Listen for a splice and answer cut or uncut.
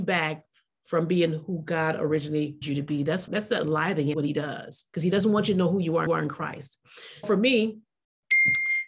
cut